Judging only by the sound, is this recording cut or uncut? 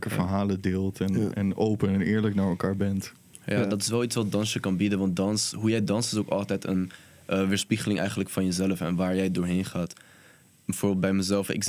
uncut